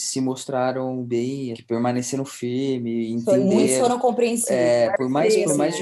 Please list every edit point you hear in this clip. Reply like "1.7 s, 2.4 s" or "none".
1.5 s